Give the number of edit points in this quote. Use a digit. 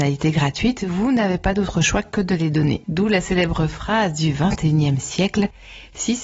0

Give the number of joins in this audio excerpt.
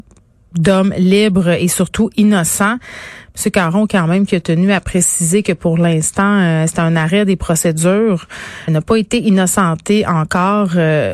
1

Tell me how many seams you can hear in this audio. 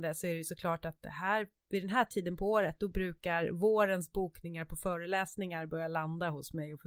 0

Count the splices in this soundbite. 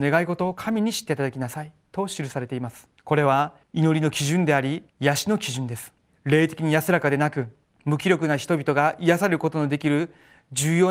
5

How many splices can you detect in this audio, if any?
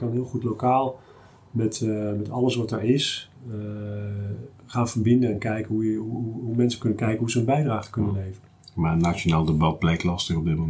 0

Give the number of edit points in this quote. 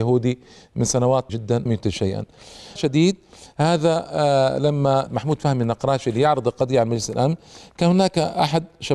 4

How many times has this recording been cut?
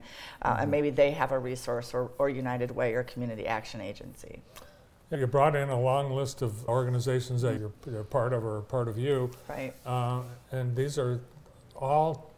3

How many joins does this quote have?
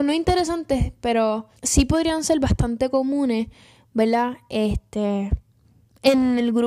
1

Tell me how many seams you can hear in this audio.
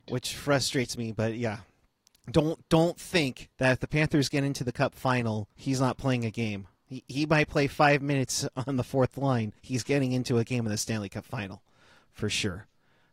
4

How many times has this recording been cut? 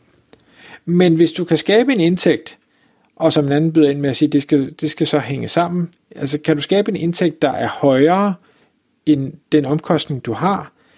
0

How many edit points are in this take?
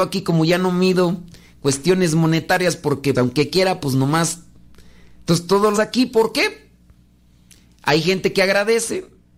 2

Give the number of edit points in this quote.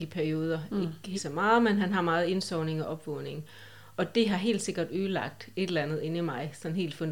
1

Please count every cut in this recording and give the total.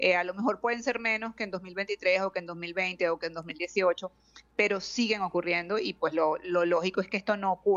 0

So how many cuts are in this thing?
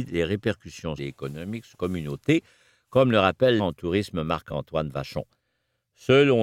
3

